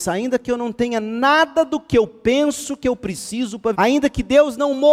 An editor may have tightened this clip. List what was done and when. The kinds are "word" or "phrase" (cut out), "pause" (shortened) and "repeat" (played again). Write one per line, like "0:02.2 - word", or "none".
0:03.7 - word